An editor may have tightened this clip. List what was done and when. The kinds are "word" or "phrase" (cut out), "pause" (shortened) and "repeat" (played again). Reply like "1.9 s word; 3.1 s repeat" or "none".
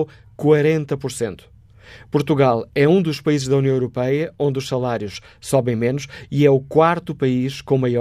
none

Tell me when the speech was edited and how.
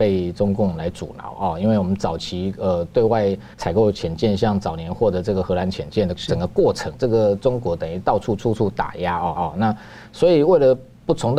3.5 s pause; 6.9 s phrase; 9.4 s repeat

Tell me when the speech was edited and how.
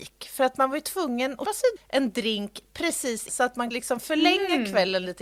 1.4 s word; 1.8 s word; 3.3 s word; 3.7 s word

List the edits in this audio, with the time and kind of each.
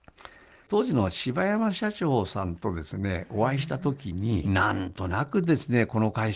4.4 s phrase

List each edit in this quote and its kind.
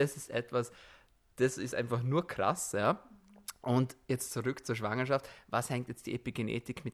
none

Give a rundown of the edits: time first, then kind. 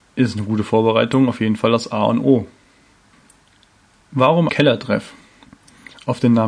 4.5 s word

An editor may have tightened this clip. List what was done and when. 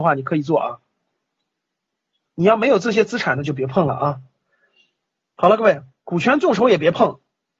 none

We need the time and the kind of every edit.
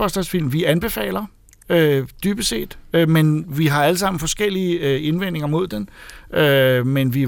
none

